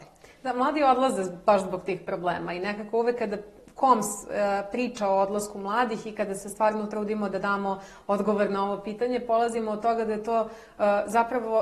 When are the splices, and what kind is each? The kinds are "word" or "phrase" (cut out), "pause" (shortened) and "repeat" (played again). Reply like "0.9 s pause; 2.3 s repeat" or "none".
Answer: none